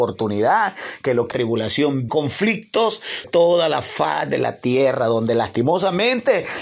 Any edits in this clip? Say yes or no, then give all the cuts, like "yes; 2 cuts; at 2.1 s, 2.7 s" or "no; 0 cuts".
yes; 3 cuts; at 1.3 s, 2.1 s, 3.2 s